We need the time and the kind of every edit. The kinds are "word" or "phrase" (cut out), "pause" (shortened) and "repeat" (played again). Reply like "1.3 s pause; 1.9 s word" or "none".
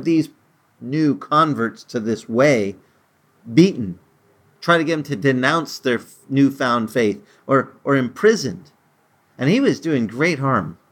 none

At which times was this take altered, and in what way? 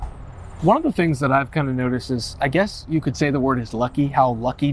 none

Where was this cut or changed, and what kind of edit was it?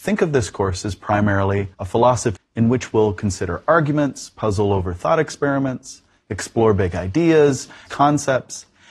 1.7 s pause; 2.4 s word; 7.9 s word

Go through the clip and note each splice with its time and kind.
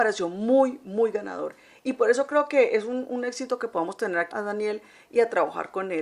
4.3 s word

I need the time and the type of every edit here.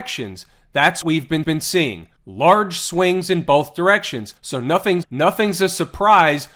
1.0 s word; 1.4 s repeat; 4.4 s pause; 5.0 s word

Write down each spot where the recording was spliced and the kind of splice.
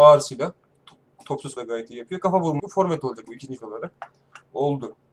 1.6 s word; 2.6 s word; 3.3 s word; 3.6 s word

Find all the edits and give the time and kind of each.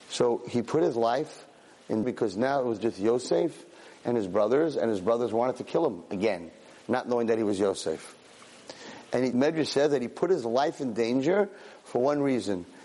2.0 s word; 9.3 s word

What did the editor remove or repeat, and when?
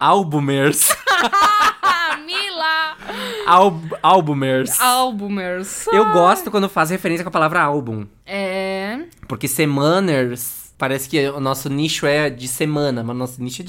none

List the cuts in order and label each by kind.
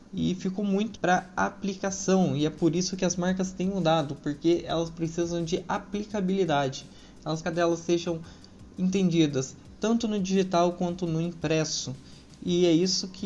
0.9 s word; 7.4 s phrase

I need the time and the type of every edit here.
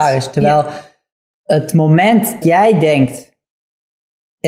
2.4 s word

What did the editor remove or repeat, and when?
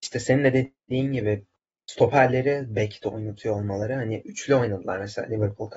none

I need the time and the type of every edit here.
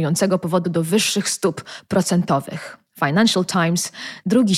none

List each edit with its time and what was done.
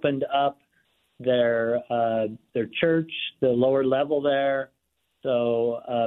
none

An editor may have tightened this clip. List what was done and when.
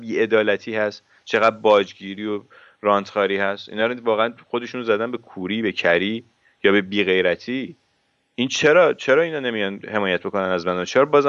none

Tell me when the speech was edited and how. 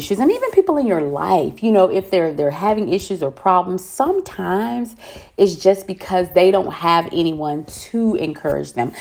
none

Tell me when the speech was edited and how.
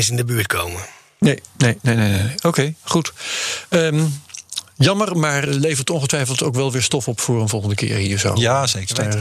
5.5 s word

